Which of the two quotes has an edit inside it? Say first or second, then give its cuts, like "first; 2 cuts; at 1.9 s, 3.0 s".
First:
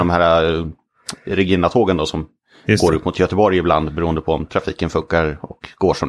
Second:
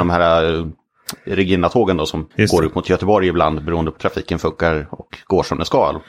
second; 2 cuts; at 2.3 s, 4.0 s